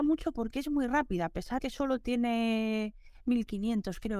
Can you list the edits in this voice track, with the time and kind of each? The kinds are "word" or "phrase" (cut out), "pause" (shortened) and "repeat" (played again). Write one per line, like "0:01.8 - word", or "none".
0:01.6 - word